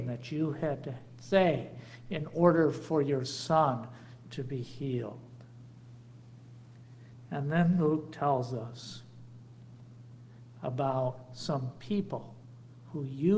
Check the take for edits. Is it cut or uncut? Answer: uncut